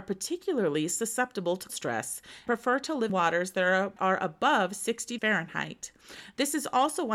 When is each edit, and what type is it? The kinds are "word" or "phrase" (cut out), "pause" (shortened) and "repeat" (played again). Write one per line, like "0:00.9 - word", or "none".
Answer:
0:01.7 - word
0:02.5 - word
0:03.1 - word
0:04.0 - word
0:05.2 - word

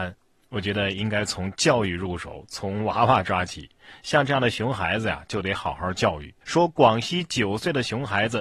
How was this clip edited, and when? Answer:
0:06.4 - pause

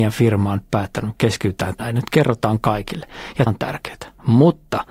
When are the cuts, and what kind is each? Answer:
0:01.8 - word
0:03.5 - word

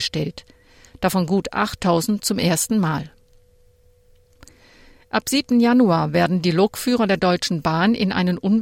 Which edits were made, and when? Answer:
none

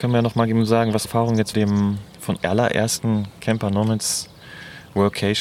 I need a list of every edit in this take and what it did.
0:01.1 - word
0:01.5 - phrase
0:02.4 - word

